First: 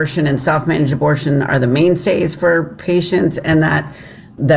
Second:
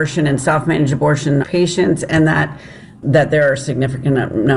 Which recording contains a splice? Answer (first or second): second